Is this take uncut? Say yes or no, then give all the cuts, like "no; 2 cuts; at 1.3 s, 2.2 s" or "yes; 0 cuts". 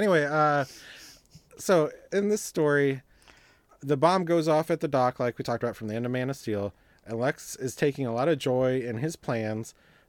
yes; 0 cuts